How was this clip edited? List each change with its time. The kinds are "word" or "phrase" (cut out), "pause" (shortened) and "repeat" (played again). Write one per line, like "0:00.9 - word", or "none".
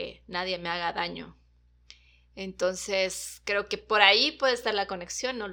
none

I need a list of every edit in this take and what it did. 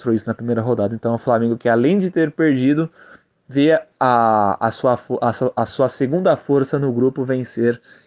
none

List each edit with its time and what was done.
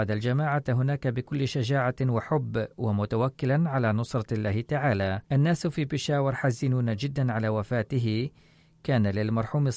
0:05.2 - pause

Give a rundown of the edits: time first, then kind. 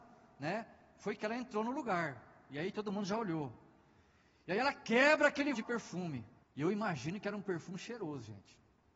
0:05.5 - word
0:06.4 - pause

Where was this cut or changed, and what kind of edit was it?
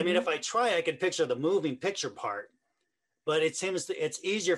none

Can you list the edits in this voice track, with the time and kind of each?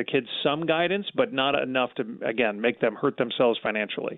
none

